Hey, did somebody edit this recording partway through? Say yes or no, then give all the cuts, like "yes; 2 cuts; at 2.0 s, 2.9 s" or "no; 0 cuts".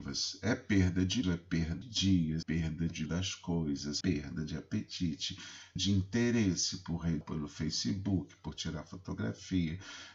yes; 7 cuts; at 1.2 s, 1.8 s, 2.4 s, 3.1 s, 4.0 s, 5.8 s, 7.2 s